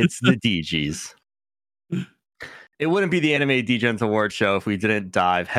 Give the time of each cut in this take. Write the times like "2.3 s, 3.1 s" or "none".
none